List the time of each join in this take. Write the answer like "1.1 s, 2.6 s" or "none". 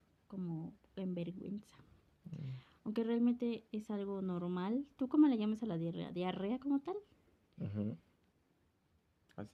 none